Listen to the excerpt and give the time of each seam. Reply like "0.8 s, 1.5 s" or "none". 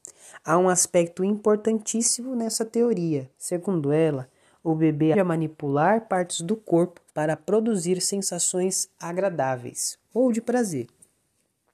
3.3 s, 5.1 s, 7.1 s